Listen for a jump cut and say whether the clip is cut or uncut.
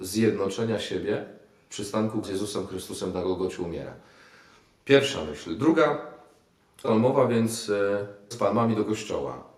cut